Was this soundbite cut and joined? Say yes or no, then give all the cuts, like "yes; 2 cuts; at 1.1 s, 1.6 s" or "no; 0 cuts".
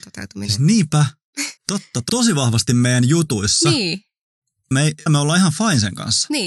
yes; 4 cuts; at 1.6 s, 2.1 s, 4.7 s, 5.1 s